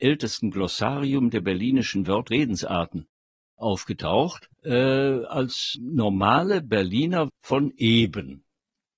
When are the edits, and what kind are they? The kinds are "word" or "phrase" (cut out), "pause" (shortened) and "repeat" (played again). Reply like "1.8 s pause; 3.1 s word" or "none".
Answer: 2.3 s word; 4.5 s pause; 5.7 s word; 7.3 s word